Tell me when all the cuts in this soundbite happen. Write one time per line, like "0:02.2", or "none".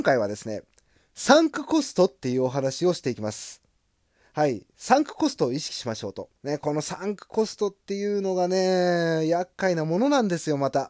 0:06.4

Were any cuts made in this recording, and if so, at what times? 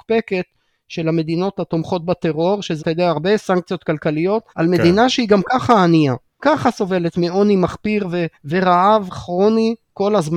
0:02.8
0:04.5
0:06.4
0:08.3

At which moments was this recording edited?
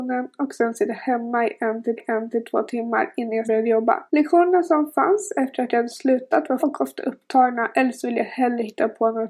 0:02.0
0:03.4
0:04.1
0:06.6

